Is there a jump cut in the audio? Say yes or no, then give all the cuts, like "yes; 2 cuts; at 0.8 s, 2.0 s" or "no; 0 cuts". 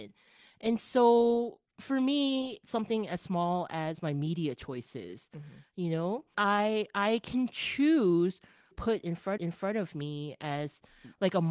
yes; 5 cuts; at 1.7 s, 2.6 s, 6.3 s, 8.7 s, 9.4 s